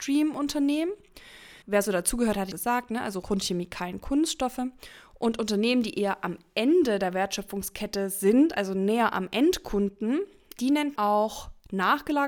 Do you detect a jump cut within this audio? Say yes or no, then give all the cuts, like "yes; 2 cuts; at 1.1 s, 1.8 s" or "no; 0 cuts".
yes; 4 cuts; at 1.6 s, 2.5 s, 3.2 s, 11.0 s